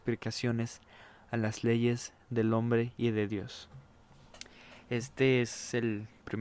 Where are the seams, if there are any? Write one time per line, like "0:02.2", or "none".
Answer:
none